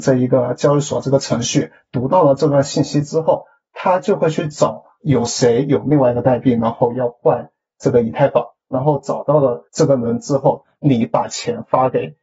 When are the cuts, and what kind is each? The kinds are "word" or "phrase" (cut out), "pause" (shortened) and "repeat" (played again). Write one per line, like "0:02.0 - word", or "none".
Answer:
0:09.7 - pause